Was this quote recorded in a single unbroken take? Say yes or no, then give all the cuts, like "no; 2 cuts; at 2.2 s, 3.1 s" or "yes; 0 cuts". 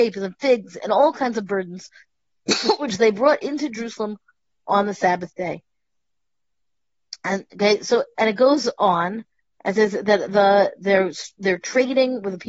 yes; 0 cuts